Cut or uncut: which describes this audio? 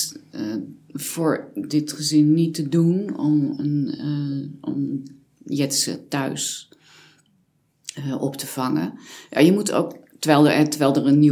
uncut